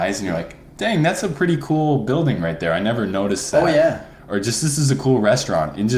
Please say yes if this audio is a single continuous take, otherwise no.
yes